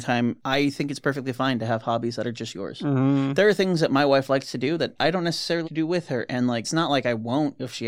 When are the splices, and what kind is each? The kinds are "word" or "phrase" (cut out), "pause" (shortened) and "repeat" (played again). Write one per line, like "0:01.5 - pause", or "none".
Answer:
0:05.6 - word
0:06.6 - word